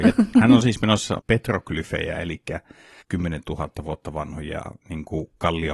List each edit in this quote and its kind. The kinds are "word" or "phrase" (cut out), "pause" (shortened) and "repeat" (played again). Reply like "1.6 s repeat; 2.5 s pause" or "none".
1.2 s phrase; 3.0 s word